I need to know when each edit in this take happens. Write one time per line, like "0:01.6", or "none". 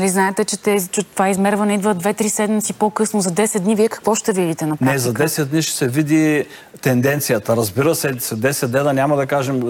none